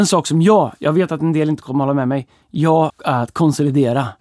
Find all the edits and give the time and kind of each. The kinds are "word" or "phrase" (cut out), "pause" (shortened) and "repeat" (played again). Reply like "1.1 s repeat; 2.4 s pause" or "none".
2.9 s word

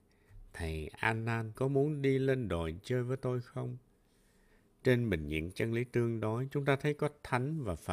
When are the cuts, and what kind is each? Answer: 1.6 s word

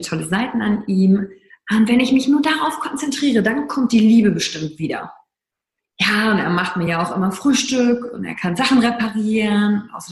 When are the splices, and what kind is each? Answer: none

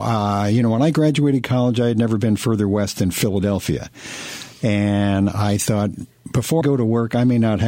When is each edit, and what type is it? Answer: 6.6 s word

